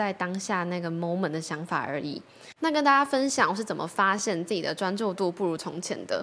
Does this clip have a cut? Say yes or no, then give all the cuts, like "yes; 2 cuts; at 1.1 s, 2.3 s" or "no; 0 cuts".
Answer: yes; 1 cut; at 2.6 s